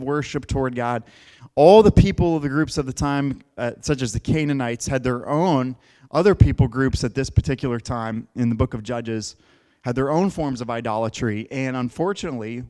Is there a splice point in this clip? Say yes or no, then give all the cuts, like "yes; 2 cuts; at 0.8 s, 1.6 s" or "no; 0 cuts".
no; 0 cuts